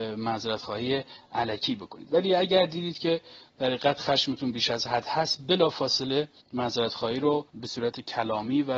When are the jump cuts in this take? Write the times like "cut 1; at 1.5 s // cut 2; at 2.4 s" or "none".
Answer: cut 1; at 6.4 s // cut 2; at 7.5 s